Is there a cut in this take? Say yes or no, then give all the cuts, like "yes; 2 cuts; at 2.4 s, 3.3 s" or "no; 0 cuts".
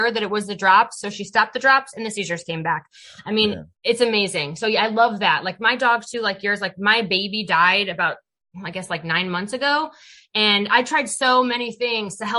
yes; 1 cut; at 3.7 s